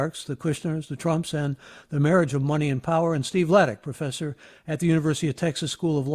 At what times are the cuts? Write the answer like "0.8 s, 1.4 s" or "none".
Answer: none